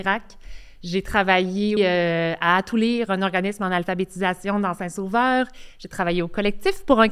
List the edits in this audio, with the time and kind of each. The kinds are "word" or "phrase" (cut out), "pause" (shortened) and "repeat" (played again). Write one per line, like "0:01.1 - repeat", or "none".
0:01.8 - word